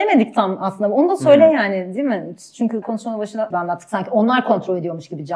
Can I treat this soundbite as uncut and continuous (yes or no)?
no